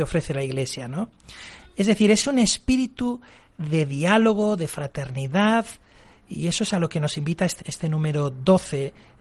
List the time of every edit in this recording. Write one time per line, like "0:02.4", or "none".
0:07.6